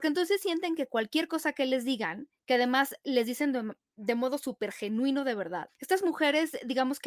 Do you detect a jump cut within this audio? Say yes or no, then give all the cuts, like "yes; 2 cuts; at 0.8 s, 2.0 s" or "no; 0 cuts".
no; 0 cuts